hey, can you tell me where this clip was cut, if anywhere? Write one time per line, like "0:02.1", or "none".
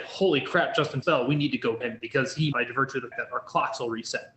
0:01.0
0:01.8
0:02.5
0:03.1